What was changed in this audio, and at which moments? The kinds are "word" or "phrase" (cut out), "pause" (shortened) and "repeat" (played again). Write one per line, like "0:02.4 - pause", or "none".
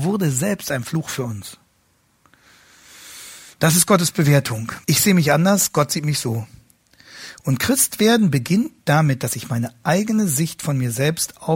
0:04.8 - pause